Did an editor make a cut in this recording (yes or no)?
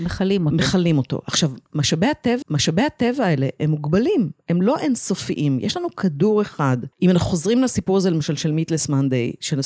yes